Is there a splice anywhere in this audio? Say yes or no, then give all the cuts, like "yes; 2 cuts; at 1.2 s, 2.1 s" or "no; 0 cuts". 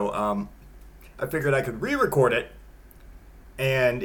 no; 0 cuts